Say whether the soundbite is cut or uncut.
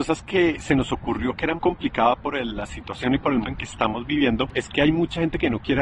cut